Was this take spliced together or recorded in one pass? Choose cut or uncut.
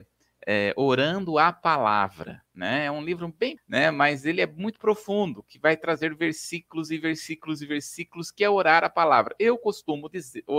cut